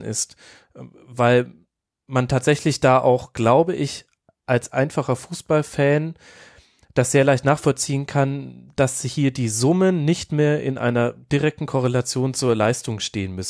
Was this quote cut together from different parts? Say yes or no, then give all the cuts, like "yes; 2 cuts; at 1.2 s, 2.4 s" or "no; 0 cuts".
no; 0 cuts